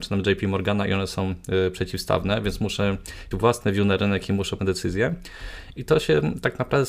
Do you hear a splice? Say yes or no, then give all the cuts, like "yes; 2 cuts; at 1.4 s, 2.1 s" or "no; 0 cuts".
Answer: yes; 2 cuts; at 3.3 s, 4.6 s